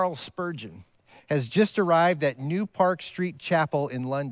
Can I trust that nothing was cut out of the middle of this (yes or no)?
yes